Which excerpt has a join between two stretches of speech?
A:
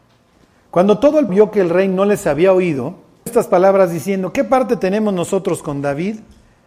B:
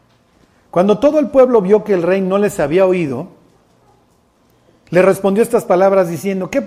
A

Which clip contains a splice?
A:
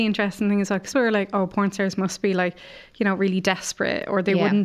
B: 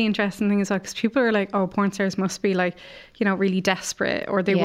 A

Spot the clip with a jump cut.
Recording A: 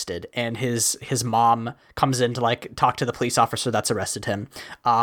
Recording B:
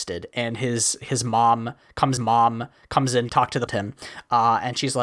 B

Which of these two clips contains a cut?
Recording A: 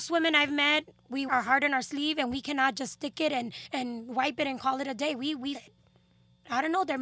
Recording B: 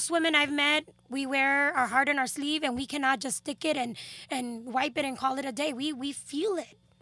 A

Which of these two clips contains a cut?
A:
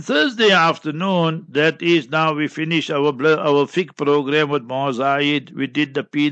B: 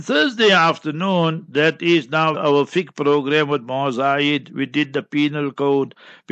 B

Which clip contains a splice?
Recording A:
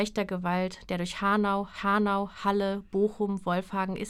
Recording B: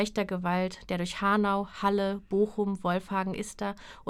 A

